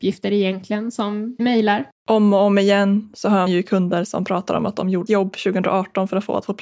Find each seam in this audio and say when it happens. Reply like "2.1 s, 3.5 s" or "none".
1.4 s, 3.5 s, 5.1 s